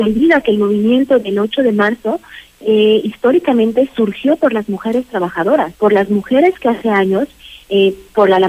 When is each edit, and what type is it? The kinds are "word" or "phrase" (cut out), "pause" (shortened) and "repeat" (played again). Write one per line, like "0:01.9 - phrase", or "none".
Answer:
0:05.7 - pause

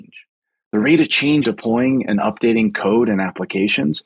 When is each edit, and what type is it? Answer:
0:01.4 - word

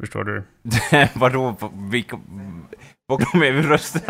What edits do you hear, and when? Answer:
0:03.2 - word

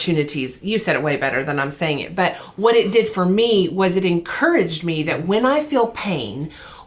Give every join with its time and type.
none

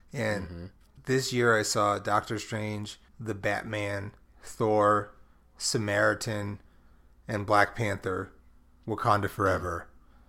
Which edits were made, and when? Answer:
0:03.1 - pause

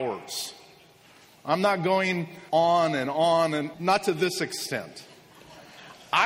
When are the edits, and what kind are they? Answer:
0:02.5 - pause
0:03.7 - word

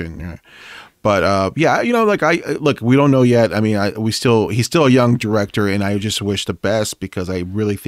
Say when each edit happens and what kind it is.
none

